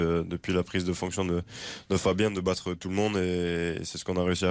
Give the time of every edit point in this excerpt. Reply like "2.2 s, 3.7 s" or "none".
none